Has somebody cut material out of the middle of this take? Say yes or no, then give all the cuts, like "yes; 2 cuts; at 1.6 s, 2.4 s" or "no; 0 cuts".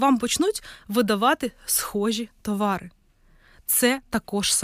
no; 0 cuts